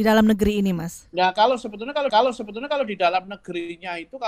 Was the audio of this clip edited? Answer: yes; 1 cut; at 2.1 s

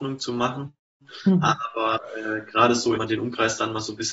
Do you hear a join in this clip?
yes; 1 cut; at 3.0 s

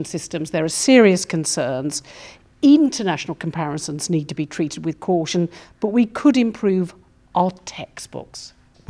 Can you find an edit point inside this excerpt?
no; 0 cuts

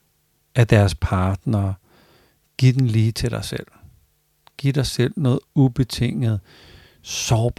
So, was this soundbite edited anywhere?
no; 0 cuts

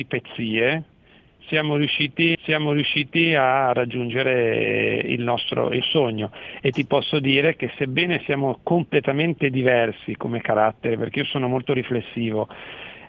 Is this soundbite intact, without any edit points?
no; 2 cuts; at 2.3 s, 5.8 s

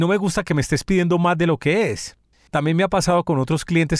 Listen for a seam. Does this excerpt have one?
no; 0 cuts

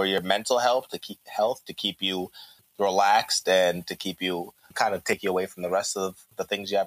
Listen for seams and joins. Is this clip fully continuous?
yes; 0 cuts

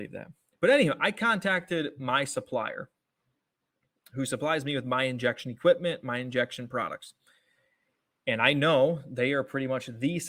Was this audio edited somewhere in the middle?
no; 0 cuts

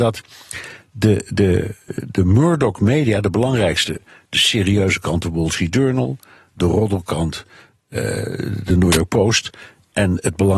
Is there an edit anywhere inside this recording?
no; 0 cuts

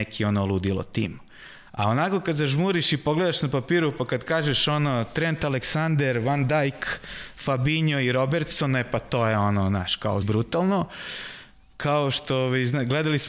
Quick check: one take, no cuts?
no; 1 cut; at 10.2 s

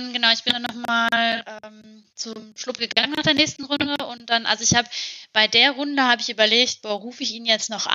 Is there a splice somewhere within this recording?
yes; 1 cut; at 2.1 s

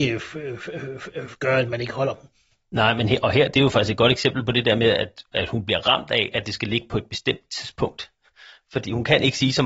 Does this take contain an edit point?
no; 0 cuts

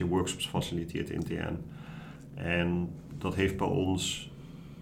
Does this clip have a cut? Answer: no; 0 cuts

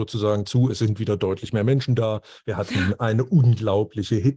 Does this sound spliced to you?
no; 0 cuts

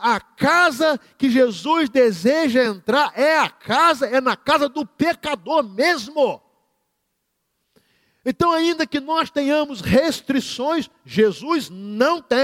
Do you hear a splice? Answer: no; 0 cuts

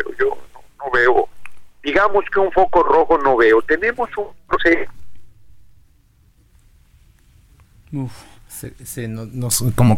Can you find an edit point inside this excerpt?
no; 0 cuts

